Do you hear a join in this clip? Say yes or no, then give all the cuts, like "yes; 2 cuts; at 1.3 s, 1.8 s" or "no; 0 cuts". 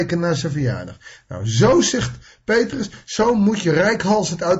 no; 0 cuts